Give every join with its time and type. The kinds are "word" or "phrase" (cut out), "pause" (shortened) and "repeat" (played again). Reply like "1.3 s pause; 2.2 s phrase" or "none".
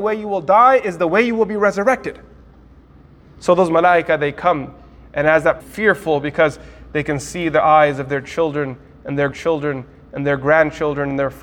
5.6 s phrase; 9.3 s repeat

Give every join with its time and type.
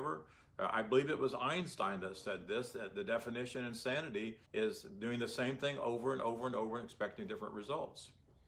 4.5 s pause

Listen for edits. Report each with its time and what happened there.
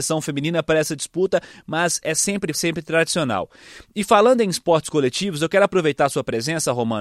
2.5 s phrase

